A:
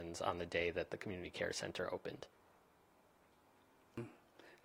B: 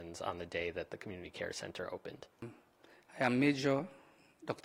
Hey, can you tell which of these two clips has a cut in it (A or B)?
B